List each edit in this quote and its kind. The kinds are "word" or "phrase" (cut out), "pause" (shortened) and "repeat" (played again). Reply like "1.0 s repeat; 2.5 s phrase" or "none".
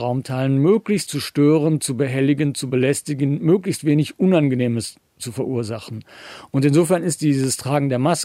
1.1 s word